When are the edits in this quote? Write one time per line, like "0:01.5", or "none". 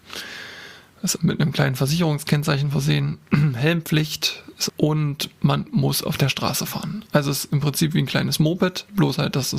0:01.2
0:04.7